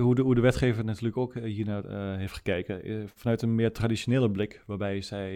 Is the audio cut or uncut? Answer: uncut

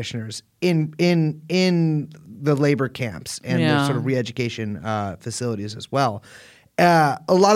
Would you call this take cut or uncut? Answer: uncut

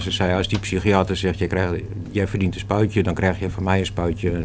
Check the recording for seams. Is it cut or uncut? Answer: uncut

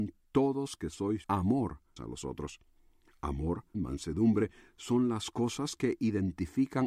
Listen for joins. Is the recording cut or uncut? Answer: cut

